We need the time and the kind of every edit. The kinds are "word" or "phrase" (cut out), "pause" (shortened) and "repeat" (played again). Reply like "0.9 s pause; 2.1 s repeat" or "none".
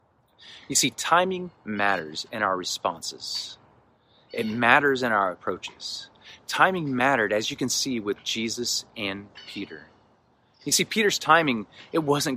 none